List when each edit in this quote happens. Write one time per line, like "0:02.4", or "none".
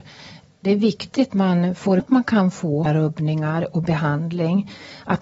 0:01.3
0:02.0
0:02.9
0:03.8